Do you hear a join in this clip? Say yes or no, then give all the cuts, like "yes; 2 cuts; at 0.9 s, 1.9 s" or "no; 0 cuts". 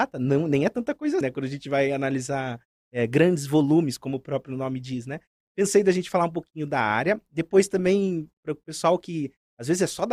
yes; 1 cut; at 1.2 s